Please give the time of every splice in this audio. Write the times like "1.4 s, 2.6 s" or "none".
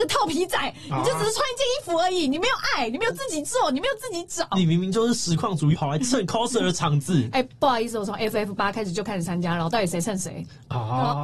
5.7 s